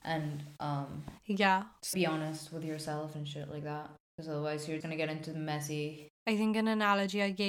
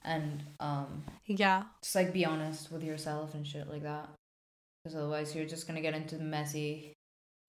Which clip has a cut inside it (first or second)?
first